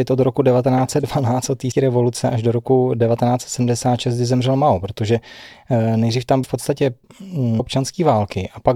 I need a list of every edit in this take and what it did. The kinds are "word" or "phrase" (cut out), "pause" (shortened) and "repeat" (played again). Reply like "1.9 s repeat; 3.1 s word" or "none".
1.7 s word; 6.4 s word; 7.6 s word